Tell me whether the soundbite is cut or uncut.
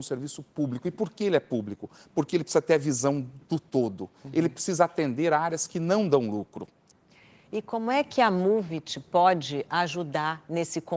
uncut